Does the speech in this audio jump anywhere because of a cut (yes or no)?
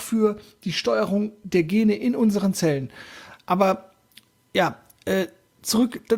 no